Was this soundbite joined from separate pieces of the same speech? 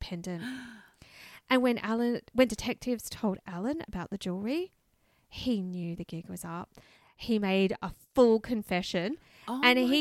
no; 0 cuts

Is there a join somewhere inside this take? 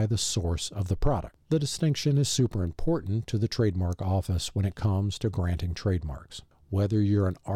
no; 0 cuts

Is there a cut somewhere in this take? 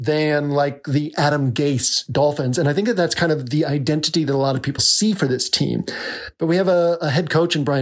yes; 1 cut; at 4.8 s

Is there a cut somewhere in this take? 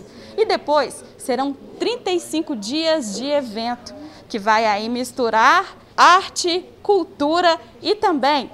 yes; 1 cut; at 5.9 s

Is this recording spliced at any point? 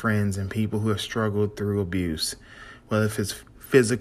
no; 0 cuts

